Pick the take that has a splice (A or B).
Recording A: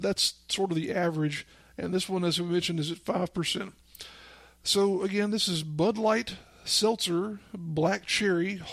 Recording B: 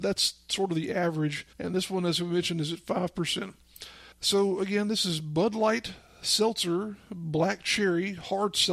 B